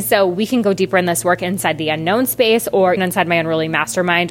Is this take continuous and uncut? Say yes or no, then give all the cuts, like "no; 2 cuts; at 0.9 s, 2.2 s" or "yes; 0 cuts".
no; 1 cut; at 3.0 s